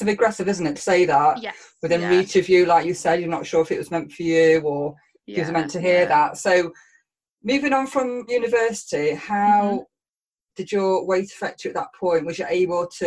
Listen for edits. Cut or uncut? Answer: cut